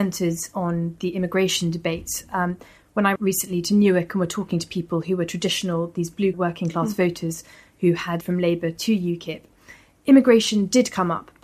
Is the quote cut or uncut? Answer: cut